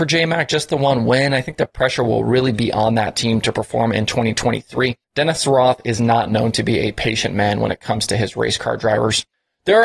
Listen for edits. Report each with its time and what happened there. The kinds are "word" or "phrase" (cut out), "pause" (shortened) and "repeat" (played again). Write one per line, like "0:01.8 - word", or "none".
0:05.0 - pause